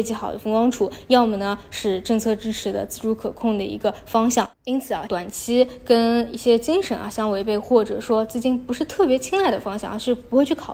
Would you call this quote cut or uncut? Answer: cut